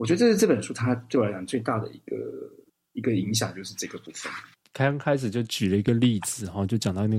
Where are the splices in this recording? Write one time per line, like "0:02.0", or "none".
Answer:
0:02.7